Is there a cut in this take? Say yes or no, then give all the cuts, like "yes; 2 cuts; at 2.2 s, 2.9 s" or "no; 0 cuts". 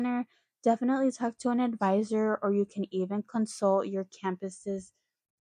no; 0 cuts